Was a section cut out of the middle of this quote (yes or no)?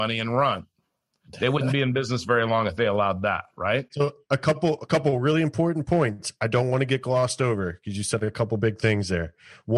no